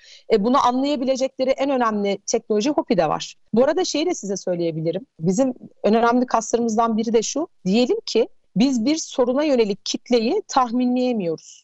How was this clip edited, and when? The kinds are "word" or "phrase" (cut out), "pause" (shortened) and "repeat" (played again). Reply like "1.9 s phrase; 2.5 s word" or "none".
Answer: none